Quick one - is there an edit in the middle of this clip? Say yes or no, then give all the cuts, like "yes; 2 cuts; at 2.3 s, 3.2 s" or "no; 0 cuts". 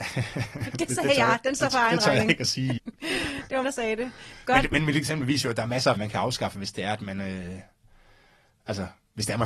yes; 3 cuts; at 2.8 s, 3.6 s, 6.0 s